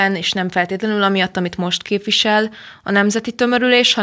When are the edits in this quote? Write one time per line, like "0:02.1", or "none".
none